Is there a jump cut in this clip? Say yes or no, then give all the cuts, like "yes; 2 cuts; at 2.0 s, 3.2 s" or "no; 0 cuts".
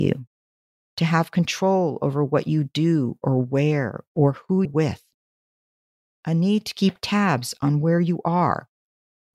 yes; 1 cut; at 4.6 s